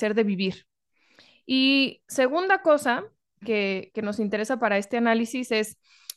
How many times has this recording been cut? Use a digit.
0